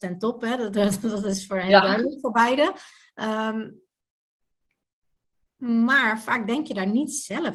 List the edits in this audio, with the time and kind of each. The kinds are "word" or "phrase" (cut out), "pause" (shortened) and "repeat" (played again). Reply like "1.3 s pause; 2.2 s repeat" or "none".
none

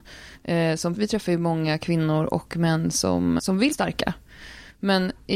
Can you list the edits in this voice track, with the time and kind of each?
0.9 s word; 3.4 s word; 3.7 s word

